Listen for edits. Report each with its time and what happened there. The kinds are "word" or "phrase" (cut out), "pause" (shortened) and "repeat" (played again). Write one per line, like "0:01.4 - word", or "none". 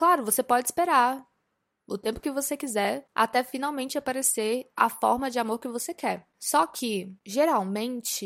0:04.7 - pause